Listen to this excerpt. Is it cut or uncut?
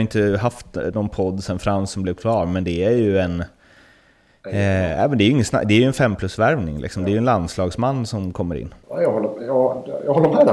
uncut